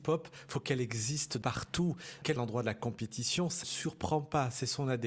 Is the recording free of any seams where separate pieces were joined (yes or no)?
no